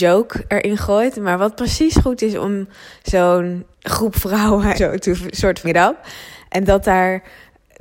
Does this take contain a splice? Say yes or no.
yes